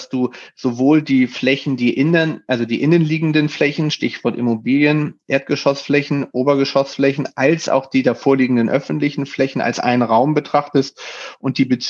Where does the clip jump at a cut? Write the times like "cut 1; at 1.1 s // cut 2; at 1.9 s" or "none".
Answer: none